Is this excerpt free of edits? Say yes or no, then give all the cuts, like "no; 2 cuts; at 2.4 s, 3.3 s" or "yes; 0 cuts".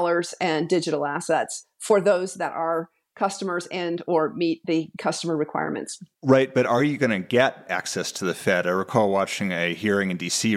yes; 0 cuts